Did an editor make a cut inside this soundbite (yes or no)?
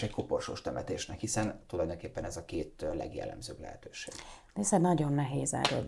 no